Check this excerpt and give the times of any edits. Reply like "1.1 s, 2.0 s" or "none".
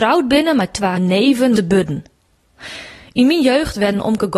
1.0 s, 1.6 s